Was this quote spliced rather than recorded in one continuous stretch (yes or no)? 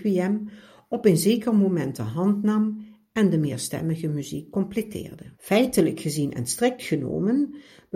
yes